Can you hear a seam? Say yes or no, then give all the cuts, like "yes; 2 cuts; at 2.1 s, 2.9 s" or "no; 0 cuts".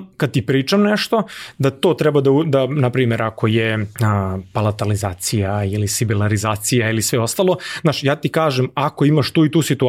yes; 1 cut; at 3.9 s